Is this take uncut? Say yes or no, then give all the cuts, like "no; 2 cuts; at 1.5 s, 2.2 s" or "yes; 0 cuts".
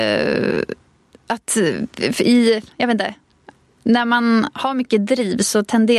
yes; 0 cuts